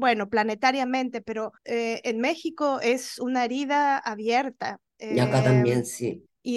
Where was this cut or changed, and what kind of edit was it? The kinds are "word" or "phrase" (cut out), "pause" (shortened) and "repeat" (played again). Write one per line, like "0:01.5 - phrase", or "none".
0:01.6 - pause
0:04.9 - pause